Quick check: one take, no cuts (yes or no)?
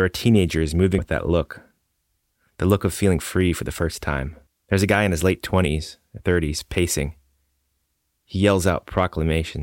no